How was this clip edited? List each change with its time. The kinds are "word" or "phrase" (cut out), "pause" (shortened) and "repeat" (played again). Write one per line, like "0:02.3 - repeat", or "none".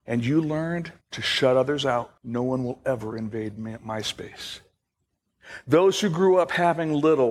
0:01.0 - pause
0:02.2 - pause